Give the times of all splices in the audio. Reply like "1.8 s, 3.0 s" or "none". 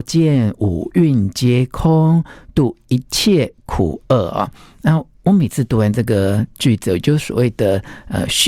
none